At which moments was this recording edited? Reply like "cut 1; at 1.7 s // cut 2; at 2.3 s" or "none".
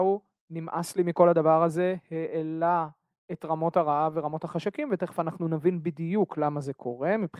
none